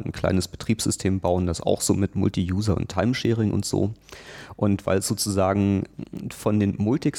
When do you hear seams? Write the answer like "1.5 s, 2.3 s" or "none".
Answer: none

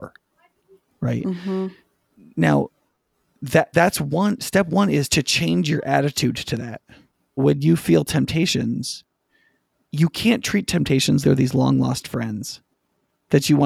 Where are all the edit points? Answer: 3.7 s, 5.1 s, 7.4 s, 11.2 s

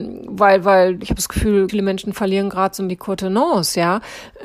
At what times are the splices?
1.0 s, 1.7 s, 2.9 s

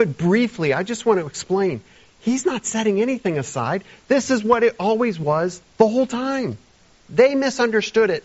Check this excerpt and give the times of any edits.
none

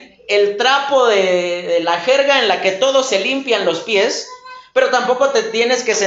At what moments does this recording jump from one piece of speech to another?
none

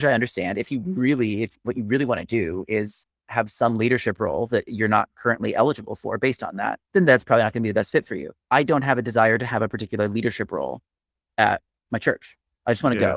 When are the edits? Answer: 6.8 s, 8.4 s

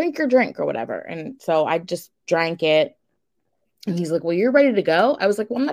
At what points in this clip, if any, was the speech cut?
none

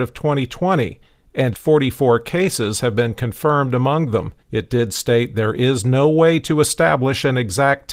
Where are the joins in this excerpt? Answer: 1.5 s, 4.4 s

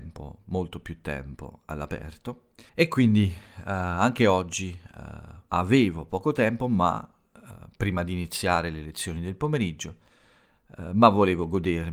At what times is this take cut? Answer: 2.7 s, 5.5 s

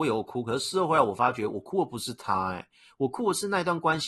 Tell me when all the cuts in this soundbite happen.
none

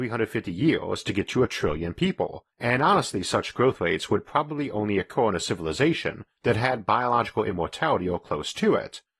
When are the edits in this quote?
2.5 s

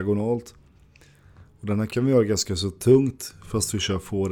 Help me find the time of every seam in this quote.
none

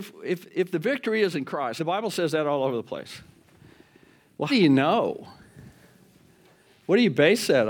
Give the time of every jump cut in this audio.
1.3 s, 1.8 s, 4.5 s

